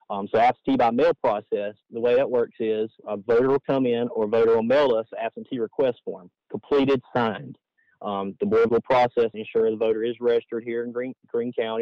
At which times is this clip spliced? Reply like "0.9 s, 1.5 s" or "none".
3.0 s, 6.4 s, 8.7 s, 9.3 s